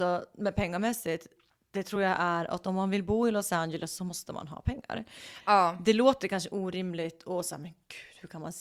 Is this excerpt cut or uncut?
uncut